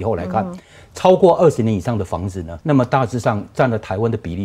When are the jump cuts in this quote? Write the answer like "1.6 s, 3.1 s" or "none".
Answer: 2.6 s